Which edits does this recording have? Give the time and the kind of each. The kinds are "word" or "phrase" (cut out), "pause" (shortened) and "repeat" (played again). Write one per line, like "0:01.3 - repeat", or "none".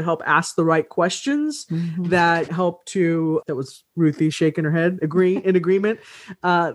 0:02.5 - phrase
0:03.4 - word